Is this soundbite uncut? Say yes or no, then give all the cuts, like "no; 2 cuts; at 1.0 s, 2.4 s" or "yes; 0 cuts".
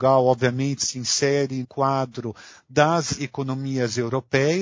no; 2 cuts; at 1.6 s, 3.2 s